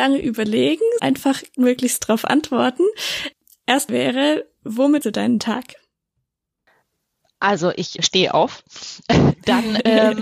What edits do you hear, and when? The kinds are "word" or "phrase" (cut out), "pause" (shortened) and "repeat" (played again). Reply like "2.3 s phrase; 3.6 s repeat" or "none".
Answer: 1.0 s word; 1.5 s word; 3.9 s word; 5.0 s word; 8.0 s word